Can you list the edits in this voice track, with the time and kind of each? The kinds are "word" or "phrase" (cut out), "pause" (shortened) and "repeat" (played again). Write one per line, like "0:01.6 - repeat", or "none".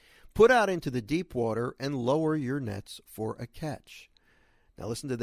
none

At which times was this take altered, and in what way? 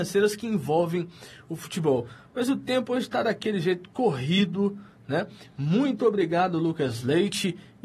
none

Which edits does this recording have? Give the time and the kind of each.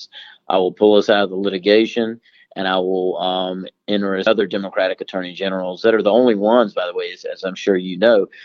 0:04.3 - phrase

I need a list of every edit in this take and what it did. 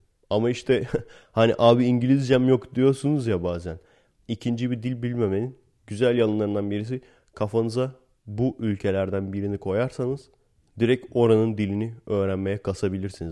none

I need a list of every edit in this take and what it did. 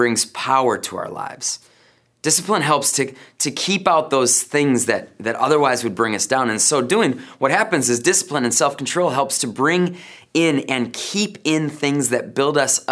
none

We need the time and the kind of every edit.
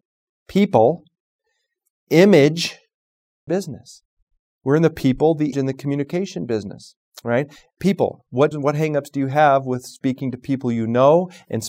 0:03.5 - phrase
0:05.5 - word
0:08.5 - word

